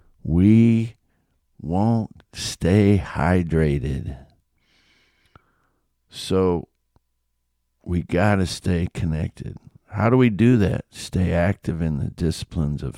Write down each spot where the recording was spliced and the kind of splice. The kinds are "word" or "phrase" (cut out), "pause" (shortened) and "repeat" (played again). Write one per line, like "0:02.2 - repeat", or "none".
none

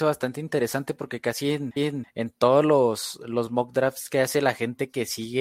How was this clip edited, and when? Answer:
0:01.8 - repeat

